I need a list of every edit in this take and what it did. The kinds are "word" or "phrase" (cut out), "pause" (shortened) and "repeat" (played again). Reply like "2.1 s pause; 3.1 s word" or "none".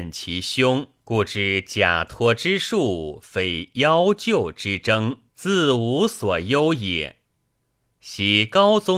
1.0 s pause; 5.3 s pause